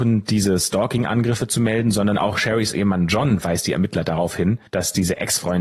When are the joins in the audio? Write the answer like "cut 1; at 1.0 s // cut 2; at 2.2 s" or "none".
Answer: cut 1; at 4.7 s